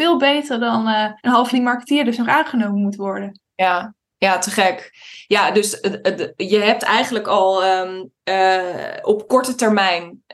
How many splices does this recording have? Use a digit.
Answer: 2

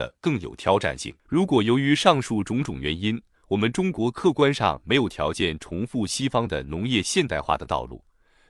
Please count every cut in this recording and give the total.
1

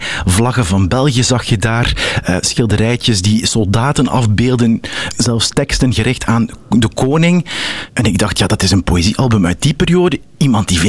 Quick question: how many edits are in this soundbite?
0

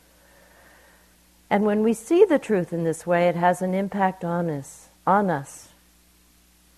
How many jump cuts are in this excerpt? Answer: 1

